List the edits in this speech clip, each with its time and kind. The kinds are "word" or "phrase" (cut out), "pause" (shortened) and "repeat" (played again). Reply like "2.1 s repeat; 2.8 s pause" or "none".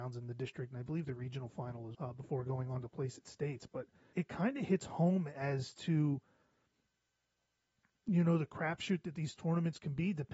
1.9 s word; 4.1 s word